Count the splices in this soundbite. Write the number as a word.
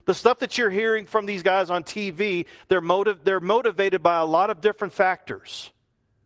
zero